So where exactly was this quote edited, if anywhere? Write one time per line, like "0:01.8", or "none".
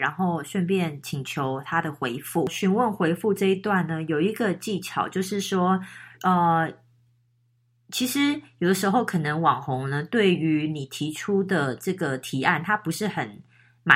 0:06.1